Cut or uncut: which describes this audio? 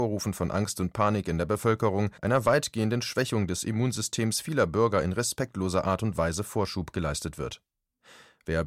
cut